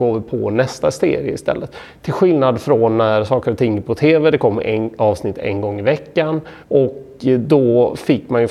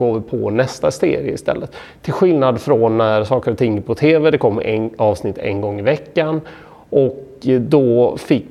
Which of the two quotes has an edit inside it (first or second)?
first